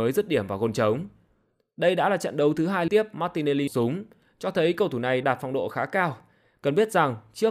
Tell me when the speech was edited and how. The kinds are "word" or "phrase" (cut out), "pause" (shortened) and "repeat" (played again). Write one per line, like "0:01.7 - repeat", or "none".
0:02.9 - word
0:03.7 - word
0:05.2 - word